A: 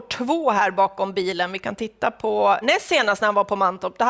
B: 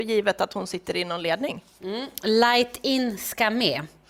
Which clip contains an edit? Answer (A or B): A